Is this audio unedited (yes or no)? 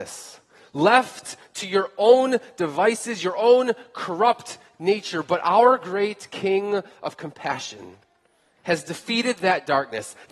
yes